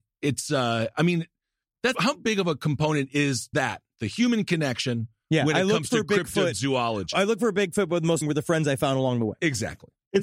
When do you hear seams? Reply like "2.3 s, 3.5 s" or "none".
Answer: 1.9 s, 3.5 s, 8.2 s